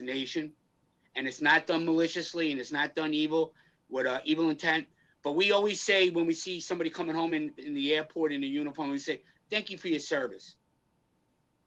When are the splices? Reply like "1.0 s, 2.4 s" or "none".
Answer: none